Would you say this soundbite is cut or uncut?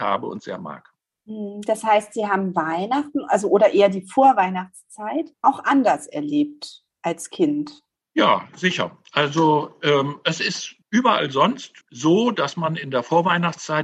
cut